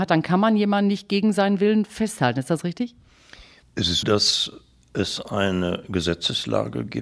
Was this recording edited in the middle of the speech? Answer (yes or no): yes